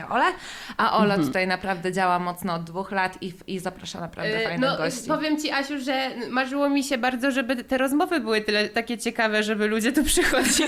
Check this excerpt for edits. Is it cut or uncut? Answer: uncut